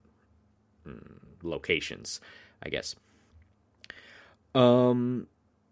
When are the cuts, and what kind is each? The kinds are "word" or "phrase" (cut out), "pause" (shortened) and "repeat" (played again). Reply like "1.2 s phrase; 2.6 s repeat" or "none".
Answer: none